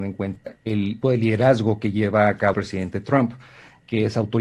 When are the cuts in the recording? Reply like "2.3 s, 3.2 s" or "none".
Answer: 1.0 s, 2.5 s